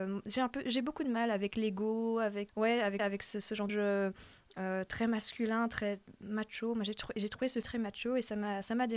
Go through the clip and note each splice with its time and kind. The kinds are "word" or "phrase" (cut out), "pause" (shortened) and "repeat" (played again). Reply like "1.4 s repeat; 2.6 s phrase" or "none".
2.5 s word; 3.0 s repeat; 3.7 s phrase; 7.6 s word

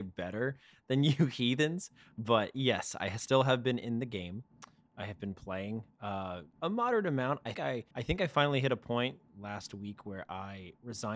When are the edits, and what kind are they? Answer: 6.5 s pause; 7.5 s word; 7.9 s pause; 9.3 s pause

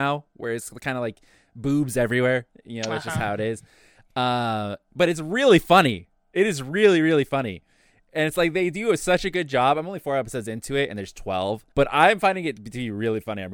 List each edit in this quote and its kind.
11.7 s pause

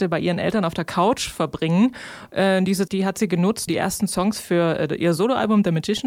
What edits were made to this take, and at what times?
2.9 s word; 3.7 s word

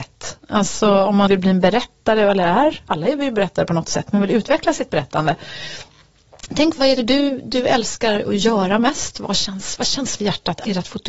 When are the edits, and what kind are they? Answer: 1.3 s word; 6.8 s word; 10.2 s word

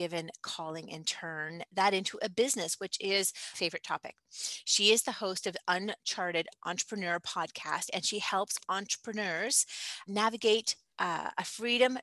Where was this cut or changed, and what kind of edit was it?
3.5 s word; 10.1 s word; 10.9 s pause

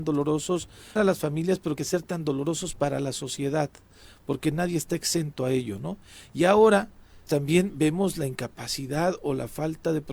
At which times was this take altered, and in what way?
1.0 s word; 1.8 s phrase; 7.3 s word

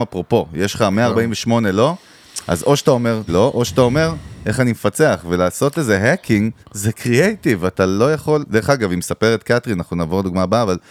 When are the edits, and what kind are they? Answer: 3.3 s word; 6.6 s pause

